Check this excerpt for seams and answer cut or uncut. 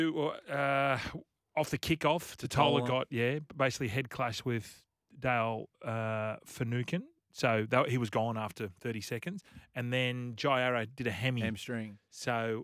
uncut